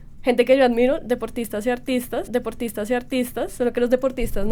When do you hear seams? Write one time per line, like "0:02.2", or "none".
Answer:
0:02.3

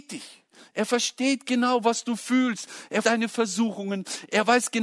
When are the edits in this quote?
0:01.4
0:03.0

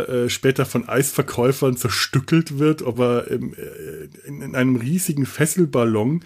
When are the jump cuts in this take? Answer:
none

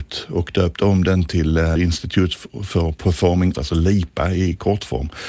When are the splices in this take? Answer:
0:01.8
0:03.5

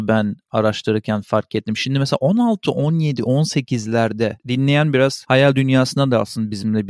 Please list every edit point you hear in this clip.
none

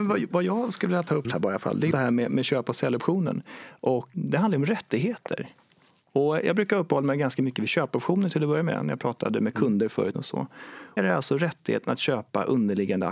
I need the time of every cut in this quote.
0:01.2
0:01.9
0:04.1
0:10.1
0:11.0

